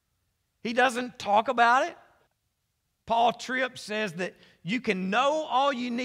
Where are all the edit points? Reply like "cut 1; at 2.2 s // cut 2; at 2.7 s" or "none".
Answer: cut 1; at 2.3 s